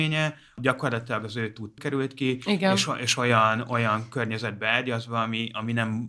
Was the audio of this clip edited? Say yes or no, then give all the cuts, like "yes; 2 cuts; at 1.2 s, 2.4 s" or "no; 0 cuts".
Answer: yes; 1 cut; at 1.8 s